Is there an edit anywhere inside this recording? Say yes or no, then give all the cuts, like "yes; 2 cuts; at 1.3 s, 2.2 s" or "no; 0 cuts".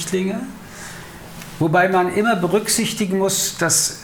no; 0 cuts